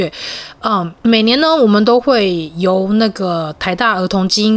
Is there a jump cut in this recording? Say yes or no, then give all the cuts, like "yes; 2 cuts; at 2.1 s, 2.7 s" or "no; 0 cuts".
yes; 1 cut; at 1.0 s